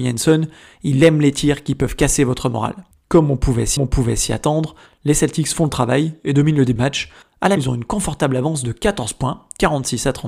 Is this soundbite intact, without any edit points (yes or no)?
no